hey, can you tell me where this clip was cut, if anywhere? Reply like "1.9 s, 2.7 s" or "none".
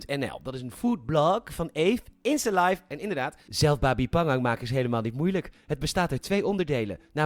3.4 s

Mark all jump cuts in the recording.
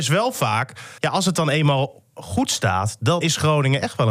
1.0 s, 3.2 s

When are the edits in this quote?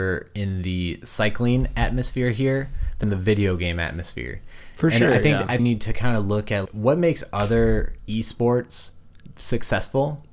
3.0 s, 5.6 s, 6.7 s

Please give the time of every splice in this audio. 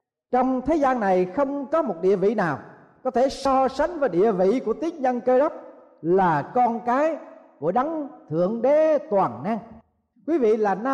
none

